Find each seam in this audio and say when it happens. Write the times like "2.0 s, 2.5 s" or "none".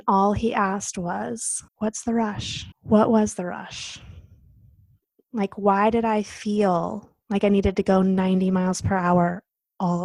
1.7 s, 2.7 s

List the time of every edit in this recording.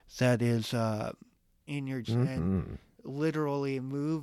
1.6 s, 2.0 s

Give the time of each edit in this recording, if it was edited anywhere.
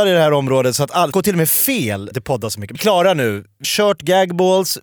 1.1 s, 2.1 s, 2.8 s, 3.6 s

